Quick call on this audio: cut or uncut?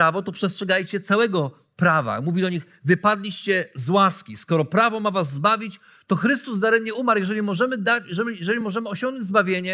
uncut